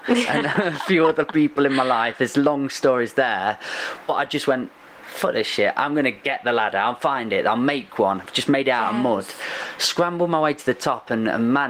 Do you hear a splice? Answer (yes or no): no